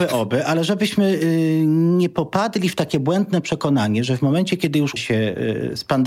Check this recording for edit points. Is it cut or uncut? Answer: cut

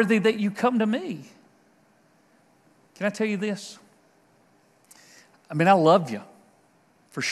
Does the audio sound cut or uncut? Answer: uncut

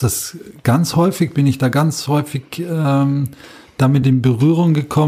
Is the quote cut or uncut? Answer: uncut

